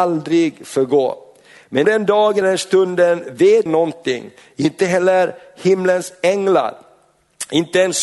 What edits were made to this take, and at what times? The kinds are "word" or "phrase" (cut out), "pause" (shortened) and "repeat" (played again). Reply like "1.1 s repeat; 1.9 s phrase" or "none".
1.8 s word; 2.4 s word; 3.7 s word